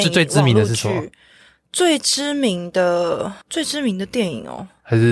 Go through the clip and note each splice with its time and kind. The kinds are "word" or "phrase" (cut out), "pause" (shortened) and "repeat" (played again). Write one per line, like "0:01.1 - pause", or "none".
0:03.4 - pause